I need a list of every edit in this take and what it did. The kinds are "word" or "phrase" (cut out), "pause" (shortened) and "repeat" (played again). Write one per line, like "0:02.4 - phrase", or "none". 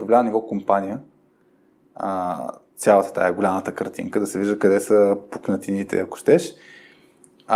none